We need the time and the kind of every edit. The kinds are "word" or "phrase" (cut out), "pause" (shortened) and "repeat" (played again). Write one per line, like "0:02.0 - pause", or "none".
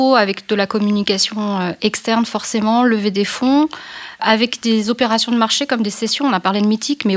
0:04.2 - word